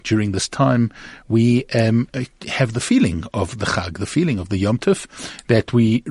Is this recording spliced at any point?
no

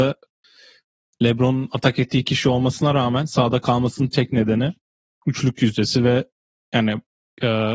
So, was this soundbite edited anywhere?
no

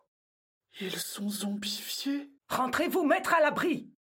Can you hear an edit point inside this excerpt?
yes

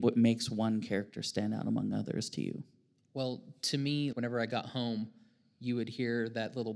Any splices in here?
yes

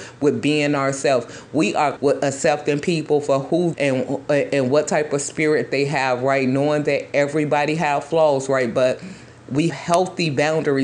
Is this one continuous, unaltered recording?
no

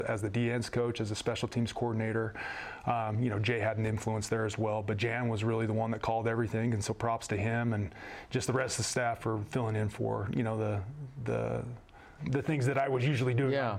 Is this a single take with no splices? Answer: no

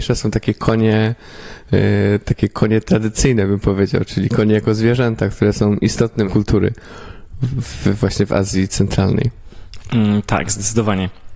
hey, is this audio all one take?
no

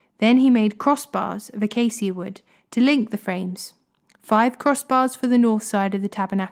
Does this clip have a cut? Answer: no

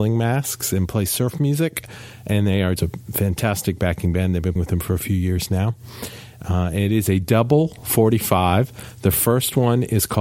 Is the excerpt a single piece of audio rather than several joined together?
no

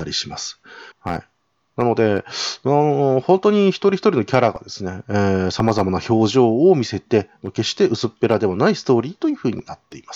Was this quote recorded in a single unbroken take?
no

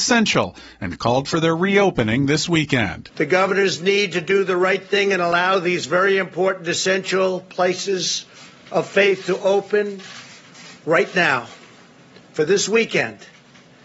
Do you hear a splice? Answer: no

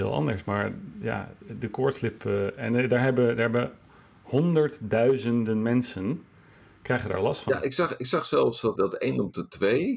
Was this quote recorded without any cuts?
no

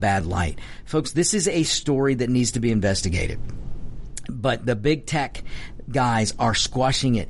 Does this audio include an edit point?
no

